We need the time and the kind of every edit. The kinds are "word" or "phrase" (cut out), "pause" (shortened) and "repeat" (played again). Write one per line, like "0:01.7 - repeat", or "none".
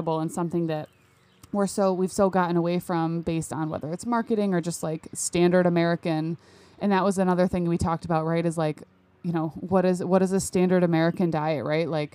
none